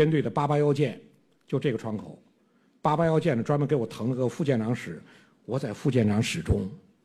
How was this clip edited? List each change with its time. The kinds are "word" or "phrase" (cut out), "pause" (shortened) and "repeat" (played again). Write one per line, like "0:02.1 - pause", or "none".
none